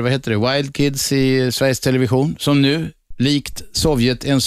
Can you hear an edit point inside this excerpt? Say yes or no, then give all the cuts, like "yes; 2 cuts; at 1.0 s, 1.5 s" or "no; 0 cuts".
no; 0 cuts